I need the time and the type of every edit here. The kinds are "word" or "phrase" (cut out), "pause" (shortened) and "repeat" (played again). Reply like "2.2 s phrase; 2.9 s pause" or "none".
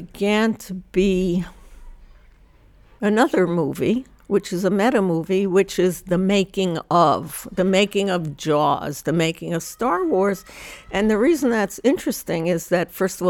none

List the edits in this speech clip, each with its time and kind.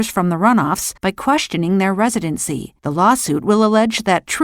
1.0 s pause; 2.8 s pause

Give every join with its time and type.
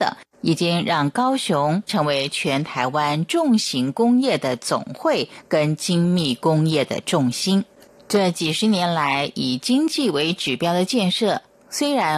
none

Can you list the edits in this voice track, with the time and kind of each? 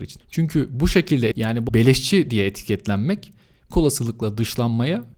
1.3 s word; 1.7 s word; 3.7 s word

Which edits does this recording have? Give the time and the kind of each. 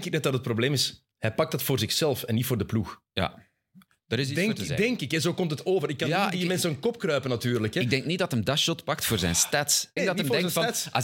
1.1 s pause; 10.0 s word

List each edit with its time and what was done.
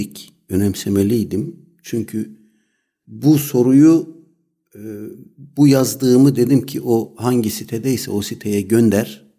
none

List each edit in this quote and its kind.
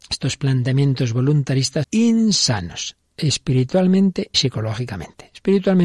1.8 s word; 4.3 s word

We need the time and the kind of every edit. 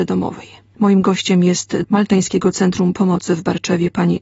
1.8 s word

